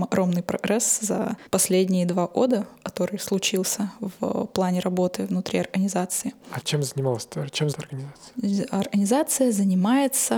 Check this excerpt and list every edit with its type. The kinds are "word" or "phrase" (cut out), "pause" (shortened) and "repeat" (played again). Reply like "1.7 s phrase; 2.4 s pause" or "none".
1.5 s pause; 6.6 s word; 7.7 s word